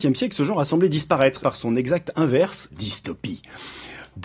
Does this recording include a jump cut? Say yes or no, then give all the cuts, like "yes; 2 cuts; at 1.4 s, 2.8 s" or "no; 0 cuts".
yes; 2 cuts; at 1.4 s, 2.7 s